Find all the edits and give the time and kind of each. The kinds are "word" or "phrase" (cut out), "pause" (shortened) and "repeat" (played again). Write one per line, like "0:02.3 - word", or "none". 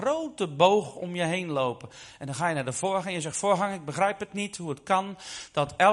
none